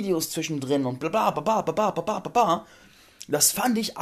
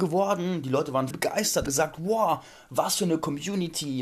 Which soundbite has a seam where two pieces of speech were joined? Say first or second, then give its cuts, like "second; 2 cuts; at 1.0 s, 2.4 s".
second; 2 cuts; at 1.1 s, 1.7 s